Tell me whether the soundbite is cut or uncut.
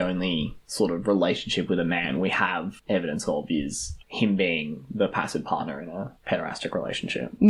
uncut